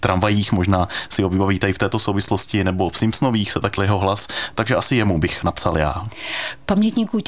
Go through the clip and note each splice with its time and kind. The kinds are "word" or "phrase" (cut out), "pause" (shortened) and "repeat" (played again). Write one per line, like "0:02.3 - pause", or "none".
0:03.8 - word